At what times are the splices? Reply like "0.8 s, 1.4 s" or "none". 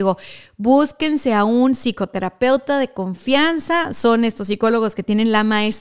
none